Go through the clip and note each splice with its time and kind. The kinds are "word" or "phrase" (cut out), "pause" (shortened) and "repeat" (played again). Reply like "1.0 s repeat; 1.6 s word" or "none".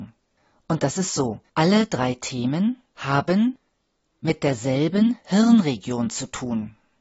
1.5 s pause